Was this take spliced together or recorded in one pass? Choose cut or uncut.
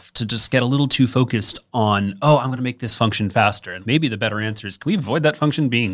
uncut